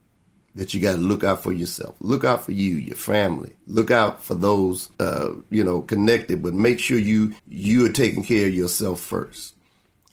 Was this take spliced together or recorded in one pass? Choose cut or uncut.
cut